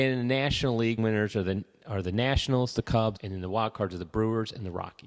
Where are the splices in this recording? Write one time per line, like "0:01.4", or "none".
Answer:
0:01.0
0:03.2